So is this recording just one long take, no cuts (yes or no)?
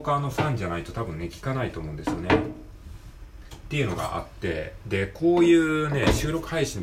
yes